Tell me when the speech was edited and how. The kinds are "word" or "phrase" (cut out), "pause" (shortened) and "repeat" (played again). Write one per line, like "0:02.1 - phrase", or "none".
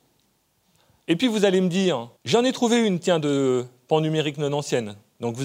0:02.2 - pause